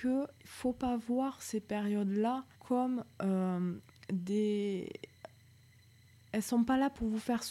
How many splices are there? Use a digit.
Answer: 1